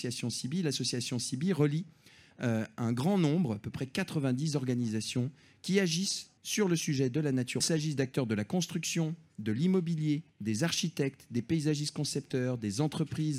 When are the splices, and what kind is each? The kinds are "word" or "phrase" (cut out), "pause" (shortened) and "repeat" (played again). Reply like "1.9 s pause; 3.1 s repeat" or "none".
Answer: 6.4 s pause; 7.6 s phrase; 10.3 s pause